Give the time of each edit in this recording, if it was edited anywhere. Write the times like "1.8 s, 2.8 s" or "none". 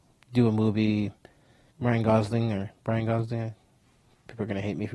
1.7 s